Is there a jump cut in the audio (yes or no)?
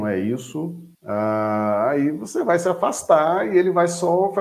yes